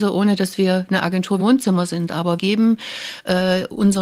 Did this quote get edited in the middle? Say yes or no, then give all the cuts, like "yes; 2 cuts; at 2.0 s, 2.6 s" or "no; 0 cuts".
yes; 2 cuts; at 1.4 s, 2.4 s